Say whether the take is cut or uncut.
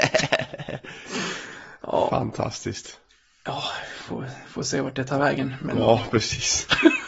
uncut